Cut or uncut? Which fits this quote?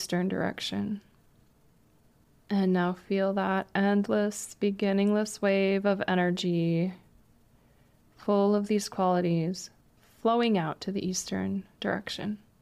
uncut